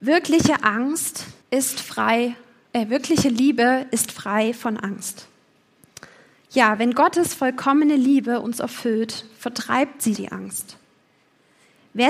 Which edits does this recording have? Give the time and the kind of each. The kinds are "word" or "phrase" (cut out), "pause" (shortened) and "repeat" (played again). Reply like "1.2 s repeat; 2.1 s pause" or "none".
1.4 s pause; 10.2 s word